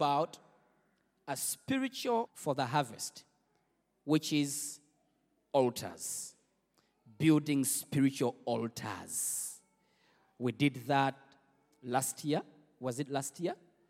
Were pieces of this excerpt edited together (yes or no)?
yes